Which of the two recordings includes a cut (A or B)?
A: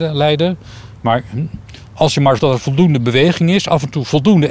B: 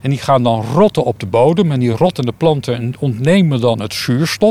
A